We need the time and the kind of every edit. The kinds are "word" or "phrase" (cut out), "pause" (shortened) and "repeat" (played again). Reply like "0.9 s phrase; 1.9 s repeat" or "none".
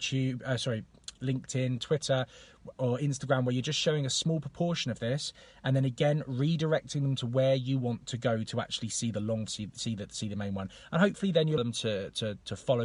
9.5 s phrase; 11.6 s phrase